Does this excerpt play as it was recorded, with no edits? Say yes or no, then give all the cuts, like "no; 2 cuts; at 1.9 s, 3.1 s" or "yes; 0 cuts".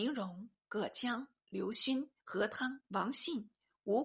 no; 2 cuts; at 2.2 s, 2.9 s